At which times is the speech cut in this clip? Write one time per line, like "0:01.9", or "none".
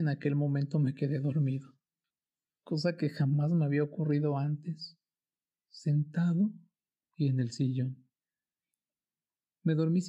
none